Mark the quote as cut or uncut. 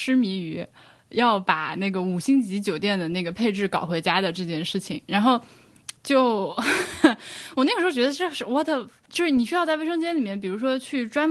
cut